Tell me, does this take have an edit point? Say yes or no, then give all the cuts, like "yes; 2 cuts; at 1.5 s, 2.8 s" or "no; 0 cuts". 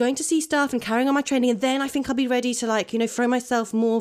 no; 0 cuts